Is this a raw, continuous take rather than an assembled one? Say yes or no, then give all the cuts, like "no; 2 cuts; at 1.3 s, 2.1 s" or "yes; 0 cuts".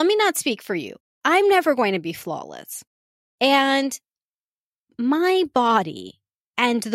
yes; 0 cuts